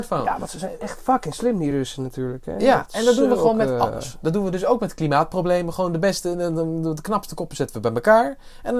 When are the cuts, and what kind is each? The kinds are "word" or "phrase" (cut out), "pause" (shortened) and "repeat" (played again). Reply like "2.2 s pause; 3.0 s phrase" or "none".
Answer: none